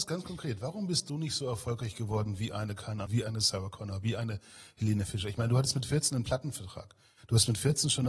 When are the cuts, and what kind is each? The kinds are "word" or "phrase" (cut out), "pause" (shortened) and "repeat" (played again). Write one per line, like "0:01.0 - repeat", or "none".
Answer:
0:03.1 - phrase